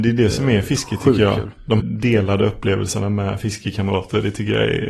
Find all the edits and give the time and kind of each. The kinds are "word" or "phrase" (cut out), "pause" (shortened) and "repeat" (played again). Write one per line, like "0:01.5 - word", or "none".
0:01.8 - word